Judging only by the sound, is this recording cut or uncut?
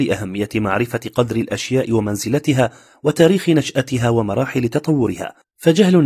uncut